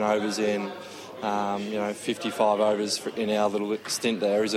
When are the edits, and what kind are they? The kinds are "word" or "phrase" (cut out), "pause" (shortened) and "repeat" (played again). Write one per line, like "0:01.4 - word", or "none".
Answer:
none